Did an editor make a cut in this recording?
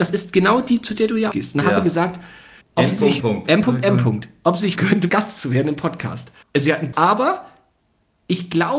yes; 7 cuts; at 1.3 s, 2.6 s, 3.2 s, 4.7 s, 5.1 s, 6.4 s, 6.9 s

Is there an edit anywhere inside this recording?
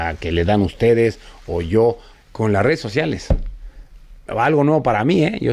yes; 1 cut; at 2.1 s

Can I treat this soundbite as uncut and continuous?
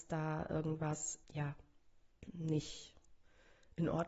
no; 1 cut; at 1.2 s

